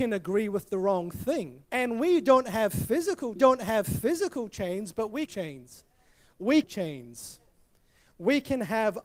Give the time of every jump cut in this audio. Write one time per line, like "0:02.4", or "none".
0:01.7
0:03.4
0:05.3
0:06.6

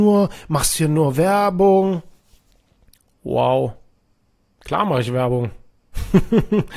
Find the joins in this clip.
none

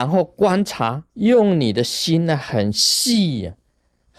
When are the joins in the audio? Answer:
0:01.1

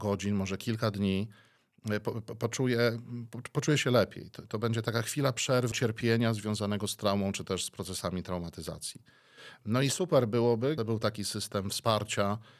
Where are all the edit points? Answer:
0:05.7
0:10.8

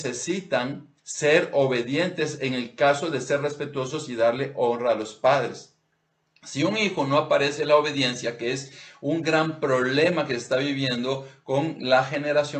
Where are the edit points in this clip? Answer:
0:01.0

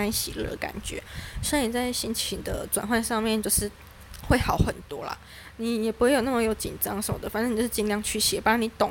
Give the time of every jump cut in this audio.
none

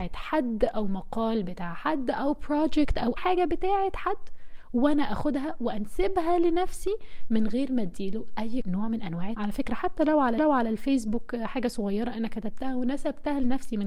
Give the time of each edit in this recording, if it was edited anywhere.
0:03.2
0:08.6
0:09.3
0:10.4

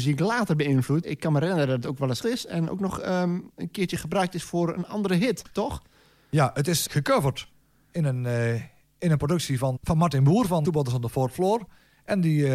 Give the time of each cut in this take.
0:01.0
0:02.2
0:06.9
0:09.8
0:10.6

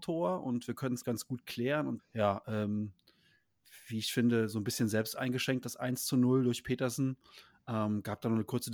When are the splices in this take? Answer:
0:01.0
0:02.0
0:05.6

